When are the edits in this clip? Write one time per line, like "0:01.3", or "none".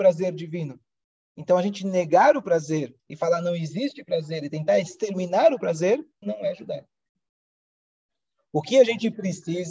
0:03.0
0:06.2

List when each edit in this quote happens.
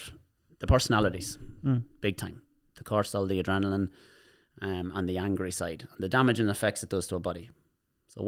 none

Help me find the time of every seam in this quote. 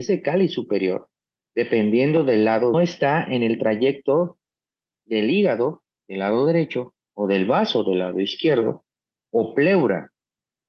0:02.7

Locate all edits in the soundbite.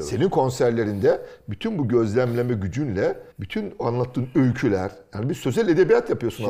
0:03.3

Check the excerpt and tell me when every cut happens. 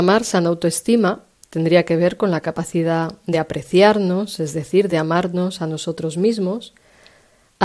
none

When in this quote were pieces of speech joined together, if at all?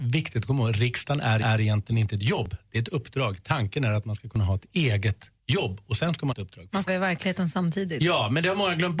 0:01.4
0:05.4
0:06.3
0:06.9

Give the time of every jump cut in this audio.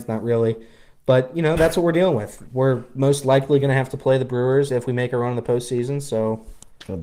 none

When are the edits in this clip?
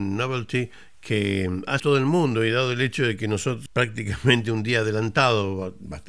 0:01.8
0:03.7

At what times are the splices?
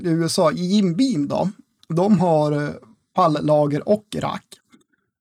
none

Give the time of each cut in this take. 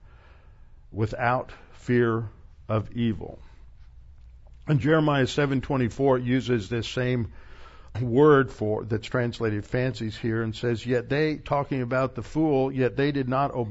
0:07.9

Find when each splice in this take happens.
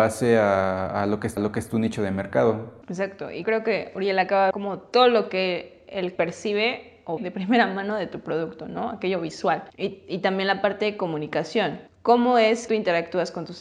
0:01.4
0:02.8
0:03.4
0:04.5
0:06.2
0:07.2
0:09.7
0:11.9
0:12.7

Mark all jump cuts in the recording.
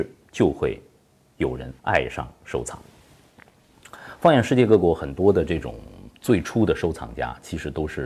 0:01.8

